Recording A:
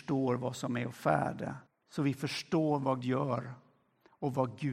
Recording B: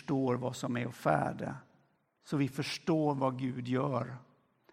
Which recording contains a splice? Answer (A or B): A